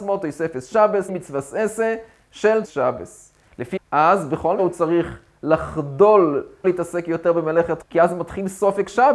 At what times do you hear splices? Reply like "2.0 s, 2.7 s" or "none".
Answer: 1.1 s, 2.6 s, 3.8 s, 4.6 s, 6.6 s, 7.8 s